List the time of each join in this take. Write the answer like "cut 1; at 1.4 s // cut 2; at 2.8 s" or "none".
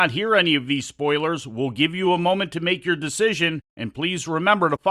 none